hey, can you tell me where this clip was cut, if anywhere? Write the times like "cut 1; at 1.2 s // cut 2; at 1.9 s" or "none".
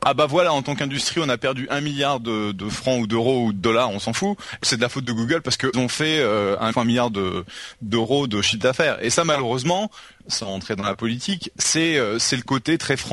cut 1; at 4.6 s // cut 2; at 5.7 s // cut 3; at 6.7 s